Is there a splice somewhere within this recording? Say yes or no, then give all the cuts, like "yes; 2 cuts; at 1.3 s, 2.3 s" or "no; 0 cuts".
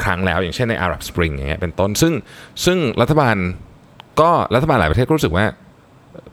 no; 0 cuts